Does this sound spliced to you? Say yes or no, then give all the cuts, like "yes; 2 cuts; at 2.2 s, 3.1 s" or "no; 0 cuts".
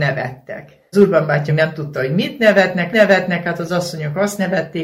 yes; 3 cuts; at 0.9 s, 1.5 s, 2.9 s